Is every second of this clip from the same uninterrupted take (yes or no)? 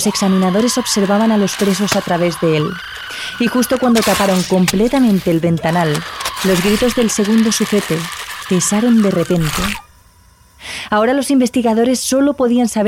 yes